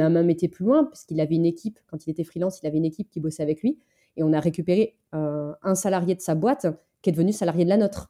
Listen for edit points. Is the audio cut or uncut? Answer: uncut